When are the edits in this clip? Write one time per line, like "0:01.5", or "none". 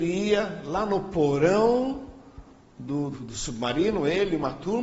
0:03.1